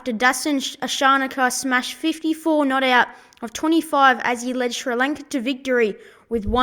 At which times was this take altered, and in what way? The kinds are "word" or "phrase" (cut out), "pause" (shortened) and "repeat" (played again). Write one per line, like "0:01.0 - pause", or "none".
none